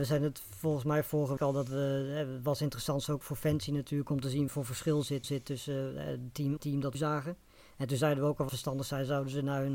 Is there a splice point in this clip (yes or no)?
yes